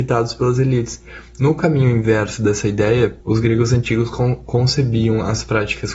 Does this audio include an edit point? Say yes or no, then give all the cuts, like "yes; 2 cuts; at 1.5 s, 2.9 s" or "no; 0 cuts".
yes; 1 cut; at 3.2 s